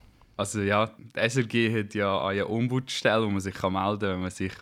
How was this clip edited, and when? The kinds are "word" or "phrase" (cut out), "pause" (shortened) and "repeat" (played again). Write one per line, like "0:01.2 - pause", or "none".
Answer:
0:01.0 - pause